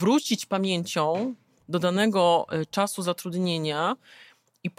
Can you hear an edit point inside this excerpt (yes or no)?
no